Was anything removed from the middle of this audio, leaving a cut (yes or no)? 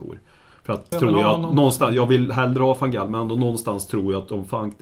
yes